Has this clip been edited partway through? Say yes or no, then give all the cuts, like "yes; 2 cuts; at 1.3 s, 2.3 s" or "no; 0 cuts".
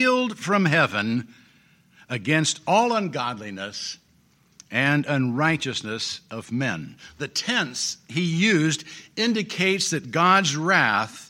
no; 0 cuts